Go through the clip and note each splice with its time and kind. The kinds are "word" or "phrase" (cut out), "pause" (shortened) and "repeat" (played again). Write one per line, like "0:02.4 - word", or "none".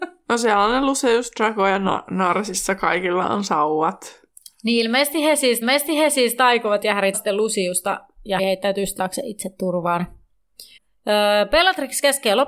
0:05.6 - repeat
0:07.1 - word
0:08.4 - word
0:09.0 - word
0:10.8 - pause